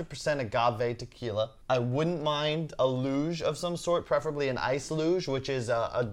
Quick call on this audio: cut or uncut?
cut